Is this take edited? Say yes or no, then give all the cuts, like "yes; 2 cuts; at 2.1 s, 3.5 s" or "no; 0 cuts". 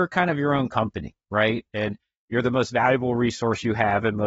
no; 0 cuts